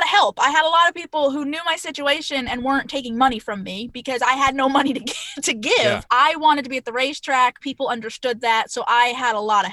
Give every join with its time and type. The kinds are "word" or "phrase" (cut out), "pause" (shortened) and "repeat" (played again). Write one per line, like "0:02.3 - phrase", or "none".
0:06.1 - pause

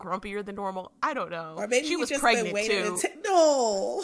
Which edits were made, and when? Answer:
none

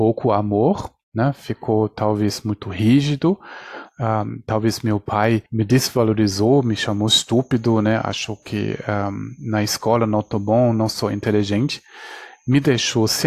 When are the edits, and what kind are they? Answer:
0:05.5 - pause

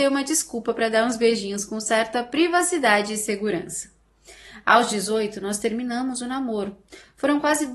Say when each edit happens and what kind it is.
none

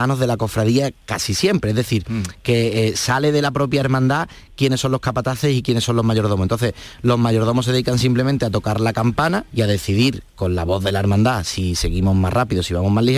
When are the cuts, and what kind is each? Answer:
0:01.0 - pause
0:09.5 - pause

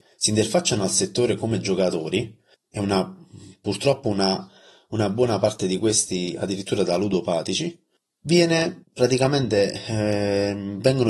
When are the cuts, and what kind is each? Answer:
none

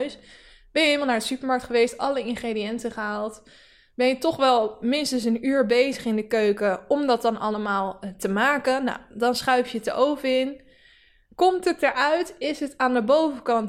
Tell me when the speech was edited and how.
none

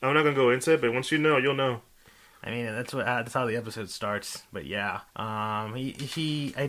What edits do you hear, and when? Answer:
0:05.1 - pause

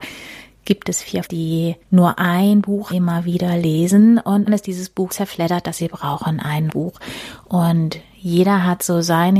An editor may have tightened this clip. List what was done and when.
0:01.2 - word
0:01.8 - pause
0:02.9 - phrase
0:04.5 - word
0:05.1 - word
0:05.8 - phrase
0:06.7 - word

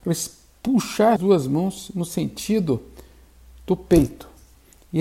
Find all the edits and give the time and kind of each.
0:01.2 - word

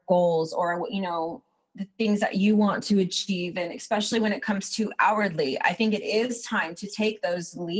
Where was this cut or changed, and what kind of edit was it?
none

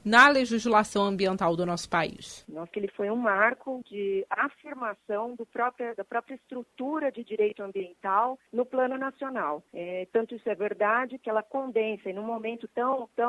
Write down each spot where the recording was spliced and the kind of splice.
0:02.7 - phrase
0:03.8 - word
0:08.5 - pause
0:09.7 - pause

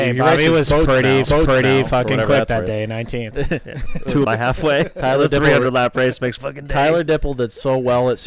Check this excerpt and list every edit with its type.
0:01.2 - repeat
0:04.2 - phrase
0:06.4 - phrase

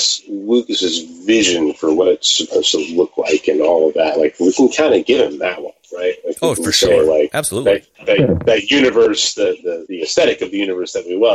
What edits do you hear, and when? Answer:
0:07.9 - pause

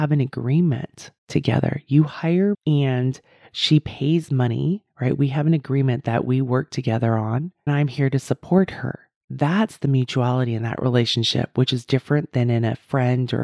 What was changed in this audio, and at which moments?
0:01.2 - pause
0:02.5 - word
0:07.7 - word

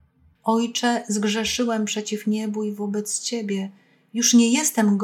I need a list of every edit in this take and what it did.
none

